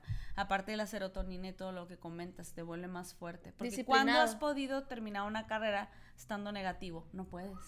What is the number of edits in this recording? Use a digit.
0